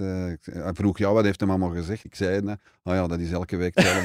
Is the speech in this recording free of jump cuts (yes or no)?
no